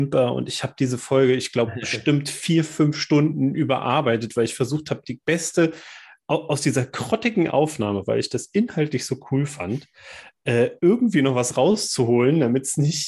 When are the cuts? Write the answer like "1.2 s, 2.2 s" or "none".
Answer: none